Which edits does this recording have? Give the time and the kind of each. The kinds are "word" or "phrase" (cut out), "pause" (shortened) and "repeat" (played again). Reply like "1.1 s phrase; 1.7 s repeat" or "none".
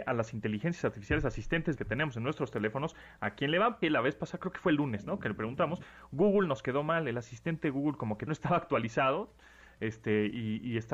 1.8 s word; 3.8 s word; 8.3 s word